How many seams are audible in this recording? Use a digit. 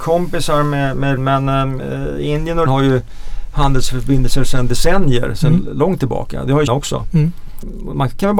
3